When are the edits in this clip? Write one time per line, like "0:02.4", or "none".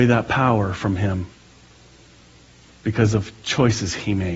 none